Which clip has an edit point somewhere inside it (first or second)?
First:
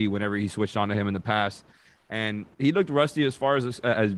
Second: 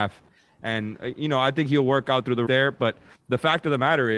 second